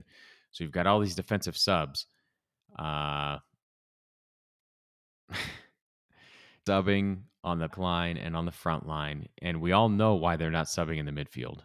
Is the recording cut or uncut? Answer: cut